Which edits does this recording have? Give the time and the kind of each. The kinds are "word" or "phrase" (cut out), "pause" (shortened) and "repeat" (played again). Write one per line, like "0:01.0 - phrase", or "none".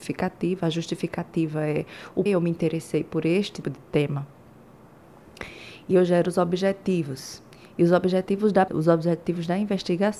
0:02.3 - word
0:03.6 - word
0:05.9 - word
0:08.7 - word